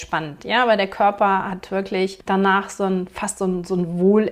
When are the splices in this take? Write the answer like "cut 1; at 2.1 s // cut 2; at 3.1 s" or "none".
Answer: cut 1; at 2.2 s